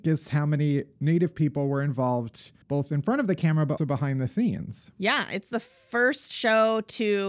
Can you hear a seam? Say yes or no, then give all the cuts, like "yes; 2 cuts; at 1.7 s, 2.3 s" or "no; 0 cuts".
yes; 2 cuts; at 2.6 s, 3.8 s